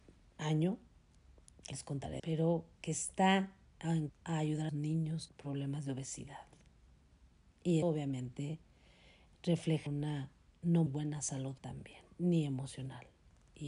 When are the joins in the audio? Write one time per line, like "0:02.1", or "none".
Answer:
0:01.7
0:02.2
0:04.1
0:04.7
0:05.3
0:07.8
0:09.9
0:10.9
0:11.6